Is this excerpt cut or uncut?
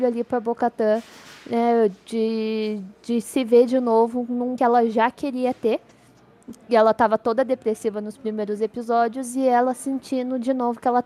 cut